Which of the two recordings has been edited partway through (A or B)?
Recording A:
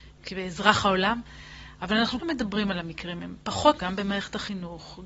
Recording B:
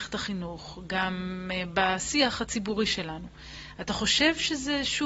A